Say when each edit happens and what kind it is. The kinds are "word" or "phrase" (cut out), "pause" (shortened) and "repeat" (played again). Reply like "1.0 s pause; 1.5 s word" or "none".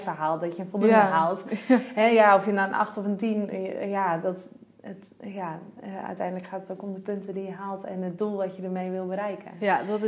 none